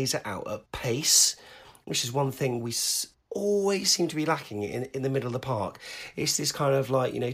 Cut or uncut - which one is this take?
uncut